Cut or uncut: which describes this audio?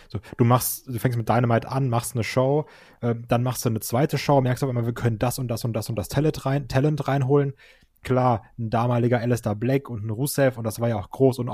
uncut